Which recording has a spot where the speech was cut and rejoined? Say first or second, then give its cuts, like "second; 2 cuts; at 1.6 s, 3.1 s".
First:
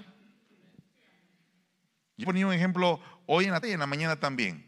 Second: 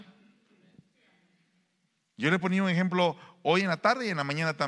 first; 2 cuts; at 2.2 s, 3.6 s